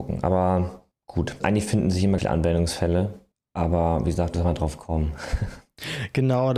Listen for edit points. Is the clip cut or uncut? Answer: cut